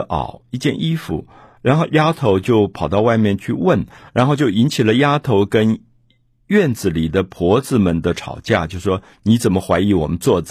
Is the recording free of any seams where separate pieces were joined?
yes; 0 cuts

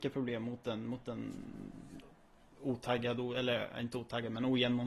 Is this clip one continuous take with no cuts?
yes; 0 cuts

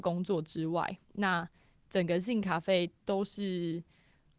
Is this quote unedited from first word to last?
no; 2 cuts; at 1.0 s, 3.0 s

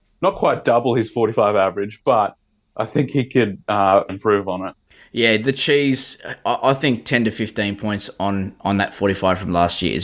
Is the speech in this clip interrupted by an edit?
yes; 2 cuts; at 4.1 s, 4.9 s

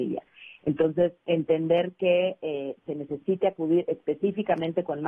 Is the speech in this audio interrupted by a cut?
yes; 1 cut; at 1.2 s

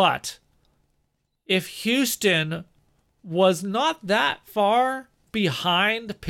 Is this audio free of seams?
yes; 0 cuts

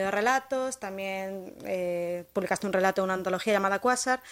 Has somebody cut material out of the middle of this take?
no; 0 cuts

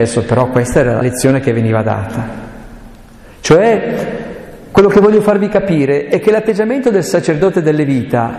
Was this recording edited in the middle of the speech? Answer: yes; 1 cut; at 1.0 s

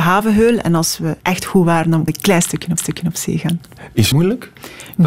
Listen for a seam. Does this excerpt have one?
yes; 4 cuts; at 1.2 s, 2.1 s, 2.8 s, 4.1 s

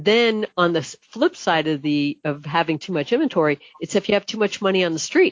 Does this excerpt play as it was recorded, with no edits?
yes; 0 cuts

